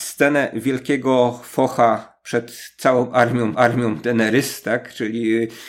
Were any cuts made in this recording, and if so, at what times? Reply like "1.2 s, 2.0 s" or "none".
3.5 s